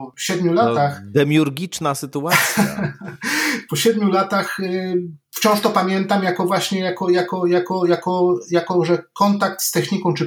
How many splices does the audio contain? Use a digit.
0